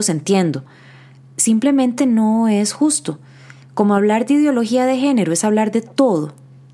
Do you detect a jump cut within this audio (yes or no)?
no